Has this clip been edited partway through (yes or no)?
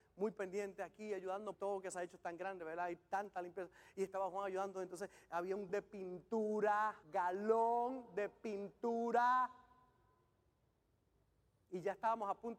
yes